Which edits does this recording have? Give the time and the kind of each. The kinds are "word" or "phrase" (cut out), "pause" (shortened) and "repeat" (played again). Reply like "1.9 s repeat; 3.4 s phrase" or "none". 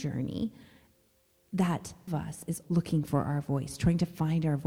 2.1 s phrase; 2.6 s word